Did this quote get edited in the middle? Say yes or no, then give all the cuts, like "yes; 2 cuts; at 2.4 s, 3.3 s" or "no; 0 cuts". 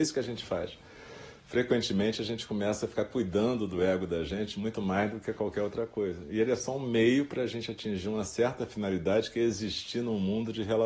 no; 0 cuts